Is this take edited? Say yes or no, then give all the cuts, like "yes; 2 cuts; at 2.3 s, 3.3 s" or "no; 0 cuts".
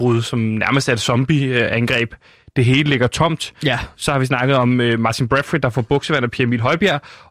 no; 0 cuts